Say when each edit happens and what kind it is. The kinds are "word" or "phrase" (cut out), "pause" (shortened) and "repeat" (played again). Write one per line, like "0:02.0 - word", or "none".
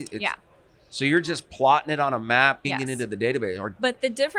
0:02.6 - word